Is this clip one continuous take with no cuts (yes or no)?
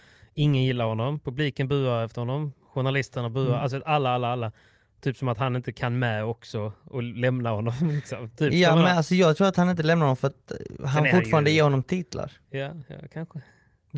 yes